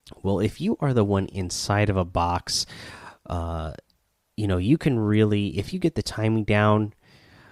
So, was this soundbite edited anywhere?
no; 0 cuts

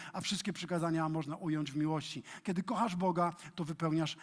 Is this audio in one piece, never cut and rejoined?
yes; 0 cuts

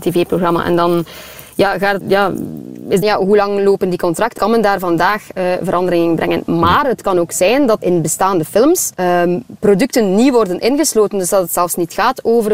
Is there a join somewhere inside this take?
yes; 5 cuts; at 2.0 s, 3.0 s, 4.4 s, 7.8 s, 8.9 s

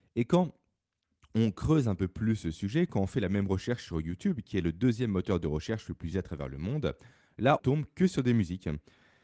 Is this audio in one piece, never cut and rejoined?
no; 2 cuts; at 6.1 s, 7.6 s

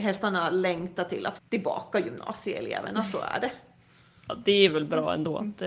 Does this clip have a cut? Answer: yes; 1 cut; at 1.4 s

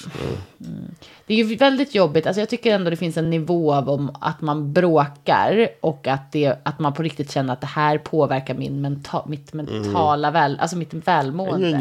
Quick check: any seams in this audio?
no; 0 cuts

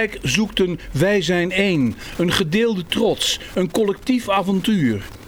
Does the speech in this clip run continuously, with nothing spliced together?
yes; 0 cuts

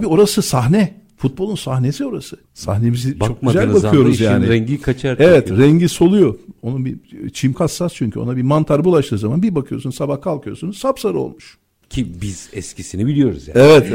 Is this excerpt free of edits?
no; 2 cuts; at 2.4 s, 7.5 s

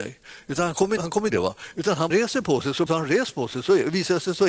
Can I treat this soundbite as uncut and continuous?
no; 4 cuts; at 1.0 s, 1.3 s, 2.1 s, 2.9 s

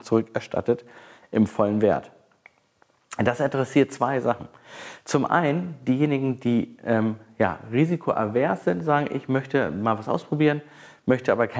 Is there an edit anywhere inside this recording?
no; 0 cuts

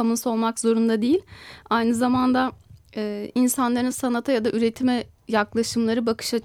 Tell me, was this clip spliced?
no; 0 cuts

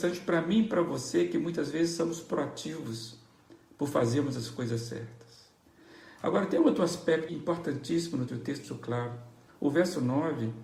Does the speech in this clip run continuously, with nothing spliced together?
no; 3 cuts; at 7.3 s, 8.3 s, 8.6 s

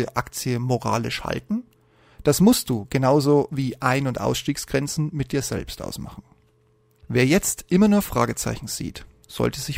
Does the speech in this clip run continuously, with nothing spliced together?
yes; 0 cuts

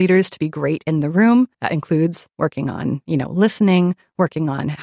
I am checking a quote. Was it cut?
yes; 1 cut; at 1.5 s

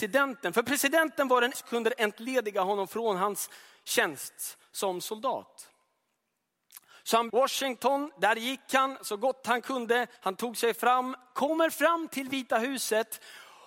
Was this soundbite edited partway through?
yes; 3 cuts; at 1.5 s, 7.3 s, 10.2 s

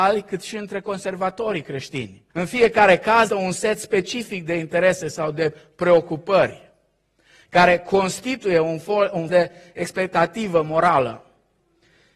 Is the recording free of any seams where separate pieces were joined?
no; 3 cuts; at 2.3 s, 3.3 s, 9.3 s

